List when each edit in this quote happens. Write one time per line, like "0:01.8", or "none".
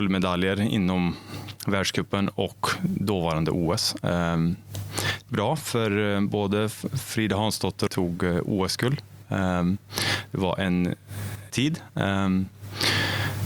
0:05.3
0:07.9
0:11.5

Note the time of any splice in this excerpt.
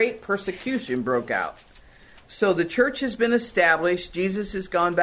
none

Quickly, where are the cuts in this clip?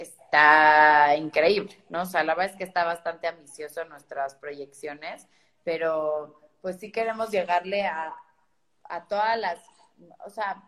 none

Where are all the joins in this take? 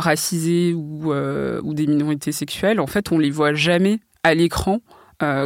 none

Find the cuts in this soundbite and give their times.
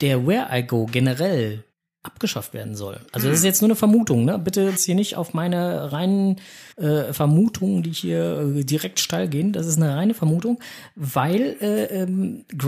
0:01.7
0:03.1
0:04.8
0:06.7

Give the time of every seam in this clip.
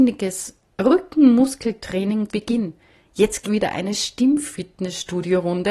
0:02.3
0:03.4

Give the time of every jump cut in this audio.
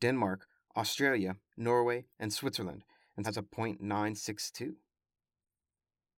0:01.5
0:02.1
0:03.2

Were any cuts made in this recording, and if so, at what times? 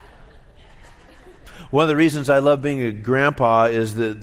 none

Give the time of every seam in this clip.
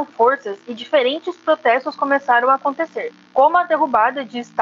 0:03.2

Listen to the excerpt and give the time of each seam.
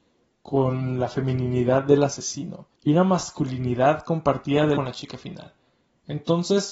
0:02.8
0:04.8

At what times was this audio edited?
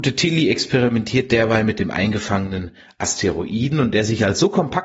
none

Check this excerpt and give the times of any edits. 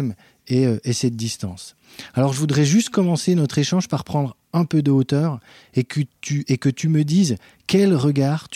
none

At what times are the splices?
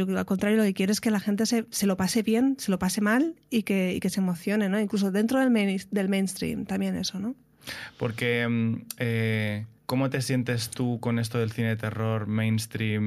0:09.8

